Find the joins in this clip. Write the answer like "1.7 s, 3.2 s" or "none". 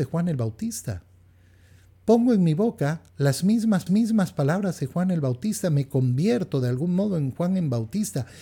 3.1 s, 3.9 s